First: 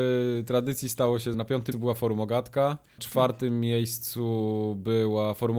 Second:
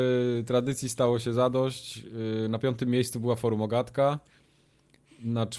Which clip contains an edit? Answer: first; 3 cuts; at 1.3 s, 1.7 s, 3.0 s

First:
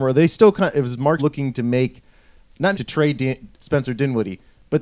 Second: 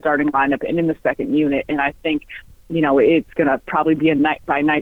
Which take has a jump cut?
first; 3 cuts; at 1.2 s, 2.7 s, 3.5 s

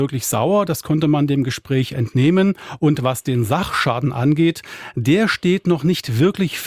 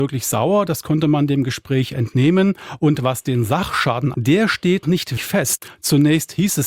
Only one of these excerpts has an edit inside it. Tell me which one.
second; 3 cuts; at 4.1 s, 4.8 s, 5.2 s

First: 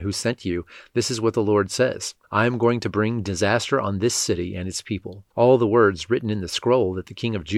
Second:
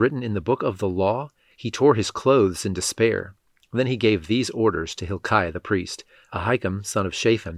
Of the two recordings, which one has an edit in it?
first; 2 cuts; at 2.2 s, 5.3 s

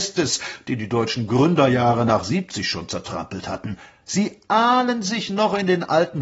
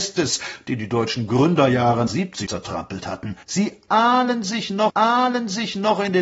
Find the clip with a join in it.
second; 4 cuts; at 2.1 s, 2.5 s, 3.4 s, 4.9 s

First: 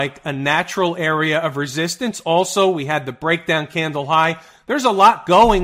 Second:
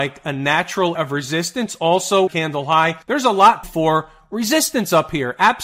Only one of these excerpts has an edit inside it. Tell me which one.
second; 4 cuts; at 1.0 s, 2.3 s, 3.0 s, 3.6 s

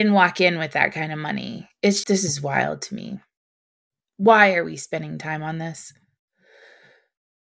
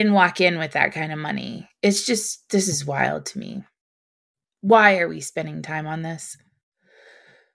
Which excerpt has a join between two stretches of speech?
first; 1 cut; at 2.0 s

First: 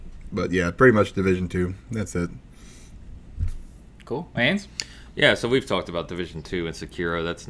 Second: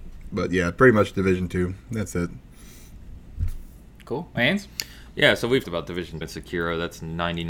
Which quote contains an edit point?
second; 2 cuts; at 5.6 s, 6.2 s

